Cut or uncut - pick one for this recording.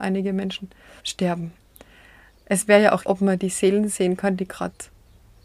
cut